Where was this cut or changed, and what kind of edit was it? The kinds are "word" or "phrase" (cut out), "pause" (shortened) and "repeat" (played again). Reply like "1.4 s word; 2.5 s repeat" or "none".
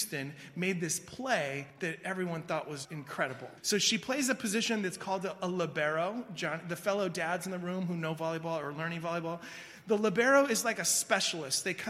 1.7 s pause; 2.8 s word; 3.6 s pause

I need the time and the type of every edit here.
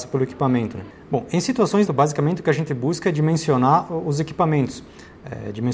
1.9 s phrase

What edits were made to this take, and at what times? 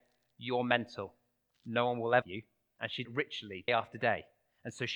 2.2 s word; 3.0 s word; 3.7 s word

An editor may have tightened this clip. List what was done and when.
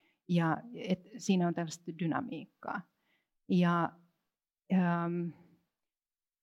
none

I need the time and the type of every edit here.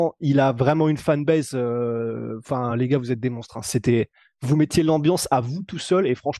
none

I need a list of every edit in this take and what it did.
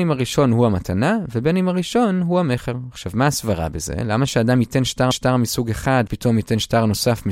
5.1 s repeat; 6.1 s word

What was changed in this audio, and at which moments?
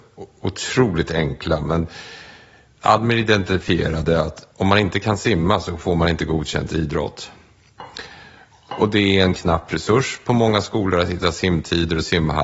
4.5 s pause

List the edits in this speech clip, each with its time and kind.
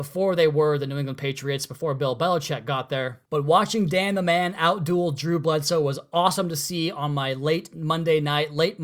3.3 s pause

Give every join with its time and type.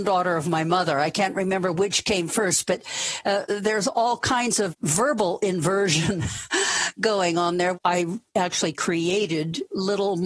8.3 s pause

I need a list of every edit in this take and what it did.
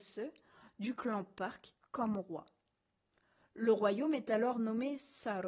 none

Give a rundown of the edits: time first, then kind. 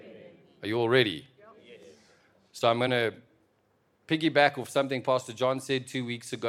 none

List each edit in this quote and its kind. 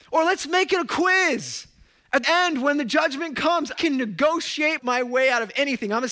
2.2 s word; 3.7 s word; 4.8 s word

